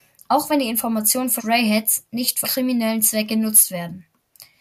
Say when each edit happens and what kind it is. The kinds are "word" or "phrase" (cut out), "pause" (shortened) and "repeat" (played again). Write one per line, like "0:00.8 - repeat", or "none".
0:01.4 - word
0:02.4 - word